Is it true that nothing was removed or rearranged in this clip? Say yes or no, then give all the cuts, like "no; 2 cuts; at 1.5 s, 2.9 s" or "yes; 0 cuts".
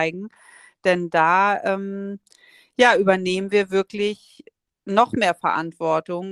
yes; 0 cuts